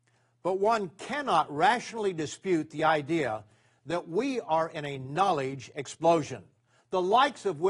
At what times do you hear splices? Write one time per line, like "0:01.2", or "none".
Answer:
none